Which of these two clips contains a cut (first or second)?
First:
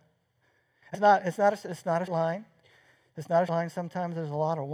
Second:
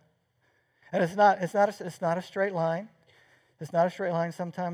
first